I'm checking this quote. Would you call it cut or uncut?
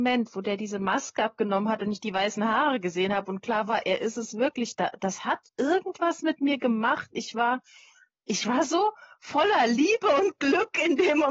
uncut